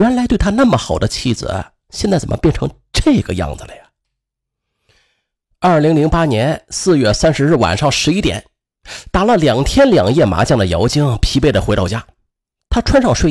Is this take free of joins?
yes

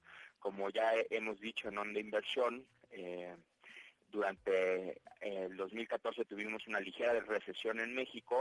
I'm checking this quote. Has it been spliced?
no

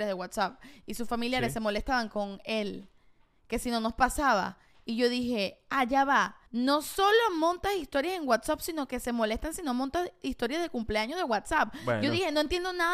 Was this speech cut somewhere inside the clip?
yes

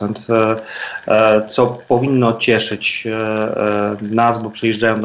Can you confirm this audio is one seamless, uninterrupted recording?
yes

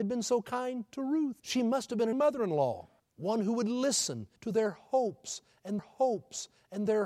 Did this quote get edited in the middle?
yes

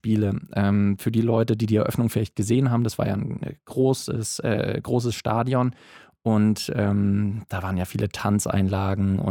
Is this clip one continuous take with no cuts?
yes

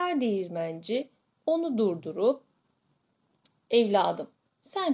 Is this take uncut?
yes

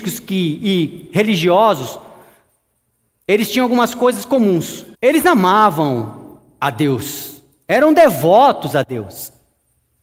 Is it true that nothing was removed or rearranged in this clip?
no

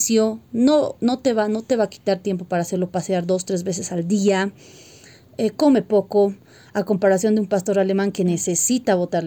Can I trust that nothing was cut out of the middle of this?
yes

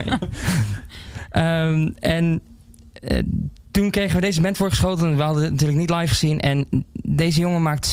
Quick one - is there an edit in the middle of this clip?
no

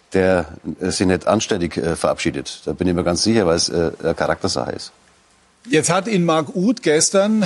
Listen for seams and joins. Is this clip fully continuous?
yes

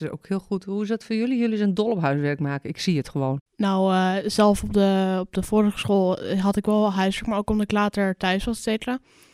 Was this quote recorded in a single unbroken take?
no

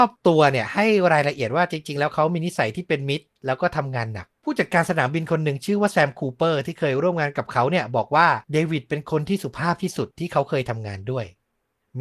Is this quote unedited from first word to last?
no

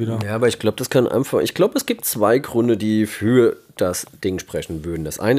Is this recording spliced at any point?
no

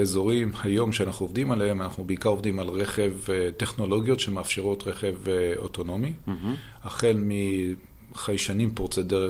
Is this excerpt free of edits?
yes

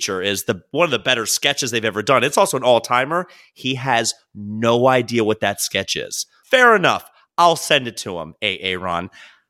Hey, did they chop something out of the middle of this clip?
no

